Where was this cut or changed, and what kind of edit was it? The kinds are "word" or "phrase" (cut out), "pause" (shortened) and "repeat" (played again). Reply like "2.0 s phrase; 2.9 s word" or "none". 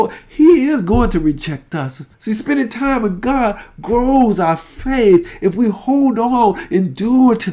2.1 s pause